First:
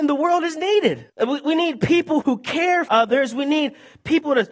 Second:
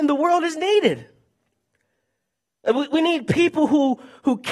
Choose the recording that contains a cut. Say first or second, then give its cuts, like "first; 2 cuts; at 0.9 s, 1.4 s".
first; 3 cuts; at 1.1 s, 2.2 s, 2.9 s